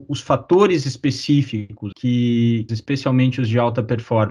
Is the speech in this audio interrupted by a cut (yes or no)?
yes